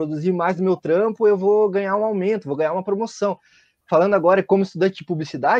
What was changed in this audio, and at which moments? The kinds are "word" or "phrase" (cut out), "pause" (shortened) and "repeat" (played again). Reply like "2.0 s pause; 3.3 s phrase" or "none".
none